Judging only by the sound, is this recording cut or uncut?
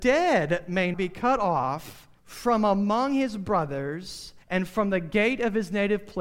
cut